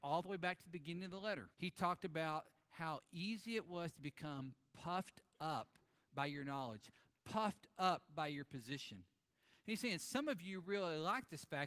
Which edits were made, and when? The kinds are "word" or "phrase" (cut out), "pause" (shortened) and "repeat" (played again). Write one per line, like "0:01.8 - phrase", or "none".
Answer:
0:01.5 - pause